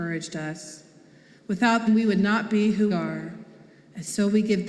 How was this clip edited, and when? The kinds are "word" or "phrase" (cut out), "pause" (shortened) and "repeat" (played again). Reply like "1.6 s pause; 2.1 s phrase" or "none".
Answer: 1.9 s word; 2.9 s word